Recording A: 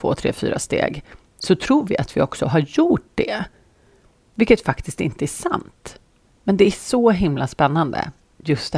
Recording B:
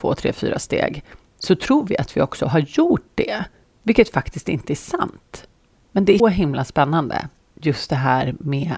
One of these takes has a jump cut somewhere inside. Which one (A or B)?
B